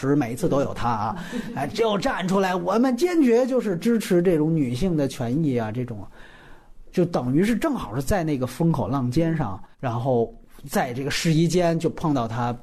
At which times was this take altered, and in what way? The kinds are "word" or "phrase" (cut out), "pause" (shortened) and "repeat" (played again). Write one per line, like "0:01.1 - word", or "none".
0:09.7 - pause